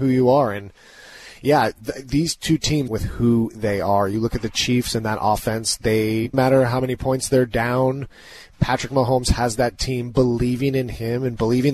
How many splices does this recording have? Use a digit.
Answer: 2